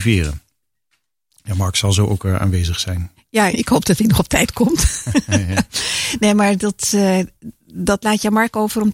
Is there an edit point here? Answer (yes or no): yes